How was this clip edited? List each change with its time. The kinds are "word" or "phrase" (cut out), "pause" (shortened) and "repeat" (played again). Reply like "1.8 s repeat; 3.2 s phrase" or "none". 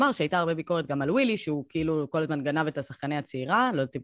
none